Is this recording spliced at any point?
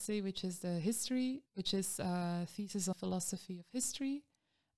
yes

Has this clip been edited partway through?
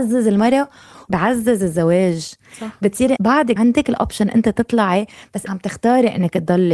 yes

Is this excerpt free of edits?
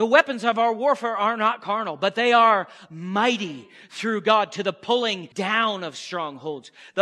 no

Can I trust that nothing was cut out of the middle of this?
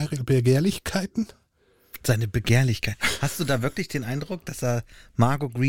yes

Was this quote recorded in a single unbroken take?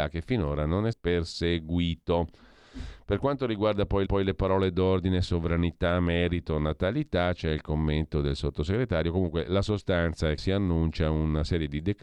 no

